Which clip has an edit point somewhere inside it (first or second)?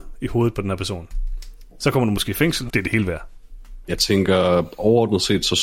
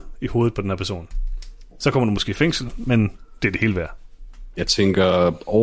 first